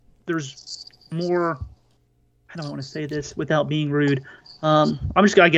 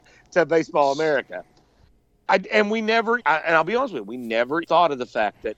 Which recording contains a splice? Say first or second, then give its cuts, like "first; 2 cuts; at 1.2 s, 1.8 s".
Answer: second; 2 cuts; at 3.2 s, 4.6 s